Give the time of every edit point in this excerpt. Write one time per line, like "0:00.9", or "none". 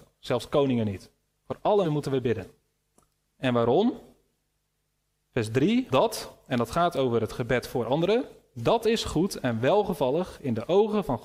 0:01.8
0:05.9